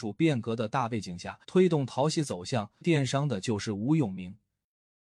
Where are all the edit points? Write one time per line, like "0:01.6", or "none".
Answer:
0:01.4
0:02.8